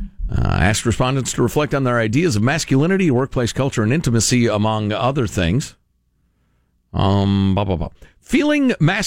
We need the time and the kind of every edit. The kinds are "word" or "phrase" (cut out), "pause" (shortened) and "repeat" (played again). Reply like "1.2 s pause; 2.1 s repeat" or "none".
none